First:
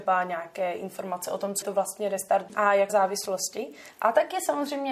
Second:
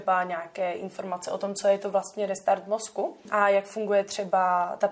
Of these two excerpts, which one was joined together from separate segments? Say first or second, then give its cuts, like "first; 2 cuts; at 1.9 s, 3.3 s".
first; 3 cuts; at 1.6 s, 2.5 s, 2.9 s